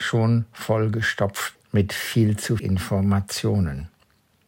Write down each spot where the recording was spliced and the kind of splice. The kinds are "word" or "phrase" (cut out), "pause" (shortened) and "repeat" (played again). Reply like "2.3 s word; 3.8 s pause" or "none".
1.5 s word; 2.6 s word